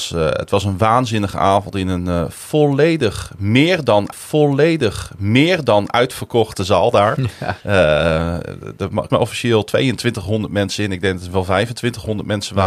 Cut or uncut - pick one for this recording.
cut